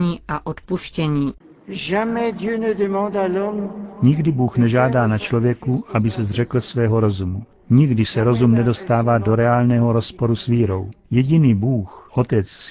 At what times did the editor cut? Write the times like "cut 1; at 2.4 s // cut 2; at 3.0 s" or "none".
none

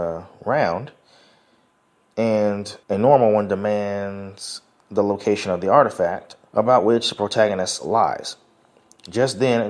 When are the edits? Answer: cut 1; at 2.8 s // cut 2; at 6.5 s

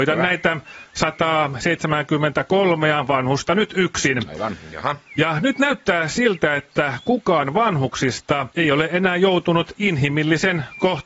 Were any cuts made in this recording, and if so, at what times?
cut 1; at 8.5 s

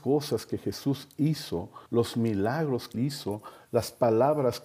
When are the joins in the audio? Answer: cut 1; at 1.9 s // cut 2; at 2.9 s

